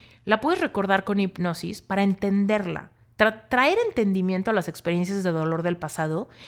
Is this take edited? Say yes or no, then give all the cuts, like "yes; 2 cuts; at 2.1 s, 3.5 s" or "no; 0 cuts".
no; 0 cuts